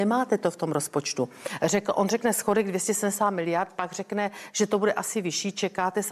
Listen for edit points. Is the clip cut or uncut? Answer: uncut